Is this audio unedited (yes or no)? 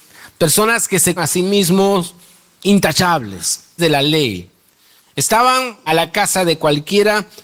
no